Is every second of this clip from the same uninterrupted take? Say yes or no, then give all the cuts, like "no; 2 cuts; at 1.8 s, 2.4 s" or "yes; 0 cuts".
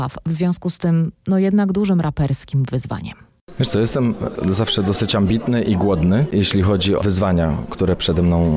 no; 1 cut; at 7.0 s